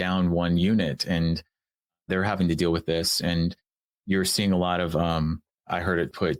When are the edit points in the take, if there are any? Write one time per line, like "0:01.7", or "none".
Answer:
none